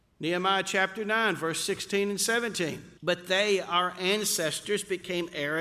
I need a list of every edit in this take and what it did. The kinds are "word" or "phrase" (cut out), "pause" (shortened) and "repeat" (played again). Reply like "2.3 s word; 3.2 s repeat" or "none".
3.0 s pause